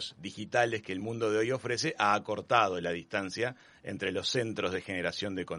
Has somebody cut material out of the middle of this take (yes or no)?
no